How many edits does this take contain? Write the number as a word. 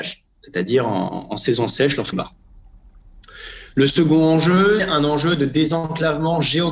two